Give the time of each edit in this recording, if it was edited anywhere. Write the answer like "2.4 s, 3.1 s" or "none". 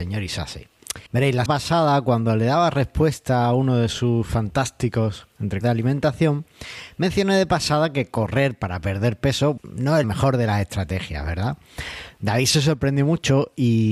1.1 s, 1.5 s, 5.6 s, 9.6 s, 10.0 s